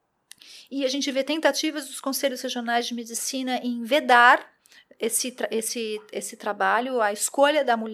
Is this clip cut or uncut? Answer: uncut